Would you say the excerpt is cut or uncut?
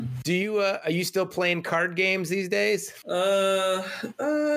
uncut